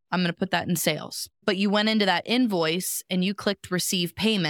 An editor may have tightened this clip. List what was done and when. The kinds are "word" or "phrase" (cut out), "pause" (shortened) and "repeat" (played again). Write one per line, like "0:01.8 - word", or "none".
0:01.3 - pause